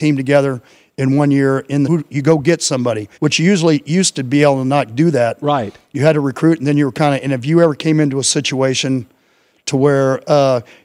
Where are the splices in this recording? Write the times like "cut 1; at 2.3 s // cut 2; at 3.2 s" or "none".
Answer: cut 1; at 1.9 s // cut 2; at 3.1 s